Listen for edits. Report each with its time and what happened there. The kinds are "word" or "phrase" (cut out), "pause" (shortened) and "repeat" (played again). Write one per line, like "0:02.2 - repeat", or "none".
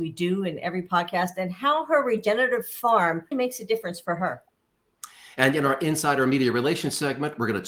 0:03.3 - word